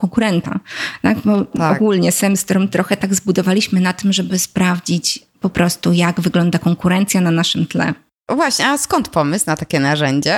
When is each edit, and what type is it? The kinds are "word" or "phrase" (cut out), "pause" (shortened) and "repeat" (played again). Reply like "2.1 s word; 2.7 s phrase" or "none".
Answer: none